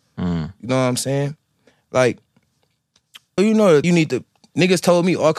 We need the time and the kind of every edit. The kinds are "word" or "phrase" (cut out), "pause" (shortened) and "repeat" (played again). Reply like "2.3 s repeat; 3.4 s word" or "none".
3.4 s word; 3.8 s word